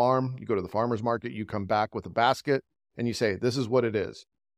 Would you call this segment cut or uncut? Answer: uncut